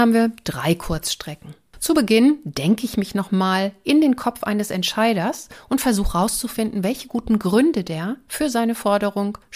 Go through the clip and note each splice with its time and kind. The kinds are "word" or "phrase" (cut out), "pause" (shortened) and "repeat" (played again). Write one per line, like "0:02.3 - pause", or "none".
none